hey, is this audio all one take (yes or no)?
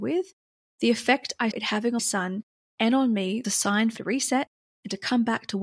no